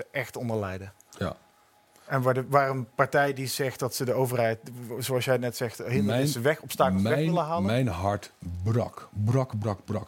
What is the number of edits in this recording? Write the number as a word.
zero